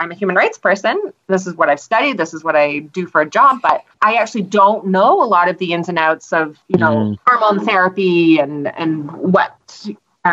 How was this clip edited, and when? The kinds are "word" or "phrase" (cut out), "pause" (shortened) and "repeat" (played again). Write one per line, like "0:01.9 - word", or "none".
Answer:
0:03.9 - pause
0:06.6 - pause